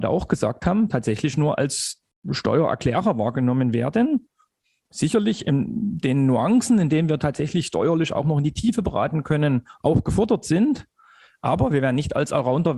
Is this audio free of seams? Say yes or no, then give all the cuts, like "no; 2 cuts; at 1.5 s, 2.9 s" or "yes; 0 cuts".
yes; 0 cuts